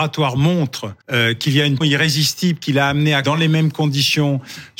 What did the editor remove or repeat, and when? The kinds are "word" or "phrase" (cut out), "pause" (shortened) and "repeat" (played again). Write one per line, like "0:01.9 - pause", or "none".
0:01.0 - pause
0:01.8 - word
0:03.2 - word